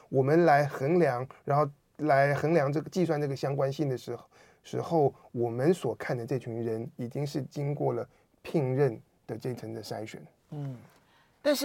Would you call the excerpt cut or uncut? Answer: uncut